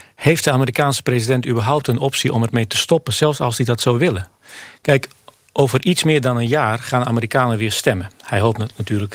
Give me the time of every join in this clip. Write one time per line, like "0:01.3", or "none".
0:05.5